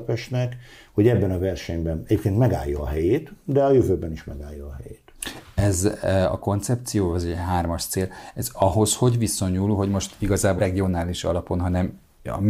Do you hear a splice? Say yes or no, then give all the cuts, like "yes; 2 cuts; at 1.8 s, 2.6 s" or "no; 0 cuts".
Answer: yes; 1 cut; at 10.6 s